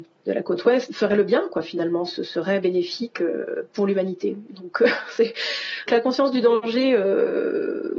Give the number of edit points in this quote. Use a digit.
1